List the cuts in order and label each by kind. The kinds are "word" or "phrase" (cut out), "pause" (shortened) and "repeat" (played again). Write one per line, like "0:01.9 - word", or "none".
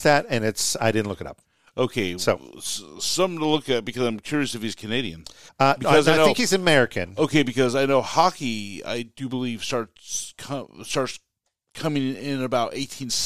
0:05.5 - pause